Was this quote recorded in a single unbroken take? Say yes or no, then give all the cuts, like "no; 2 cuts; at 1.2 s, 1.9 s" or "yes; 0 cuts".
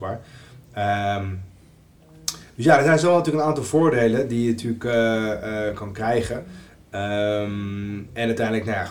yes; 0 cuts